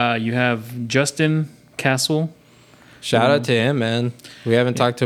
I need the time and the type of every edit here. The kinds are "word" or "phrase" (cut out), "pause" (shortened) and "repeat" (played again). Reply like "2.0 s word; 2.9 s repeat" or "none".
none